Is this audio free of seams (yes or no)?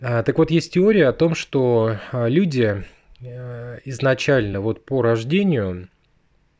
yes